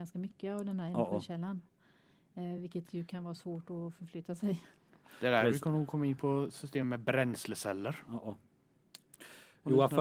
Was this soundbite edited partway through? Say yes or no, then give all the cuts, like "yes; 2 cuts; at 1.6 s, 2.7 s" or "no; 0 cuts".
no; 0 cuts